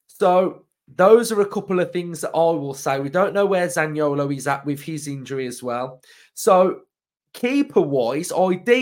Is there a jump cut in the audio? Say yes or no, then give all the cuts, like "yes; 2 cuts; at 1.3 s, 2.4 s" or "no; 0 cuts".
no; 0 cuts